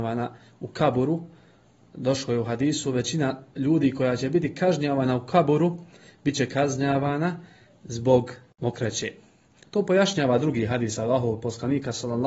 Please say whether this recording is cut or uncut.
uncut